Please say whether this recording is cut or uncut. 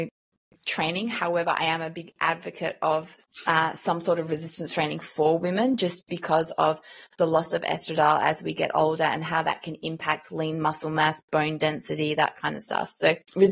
uncut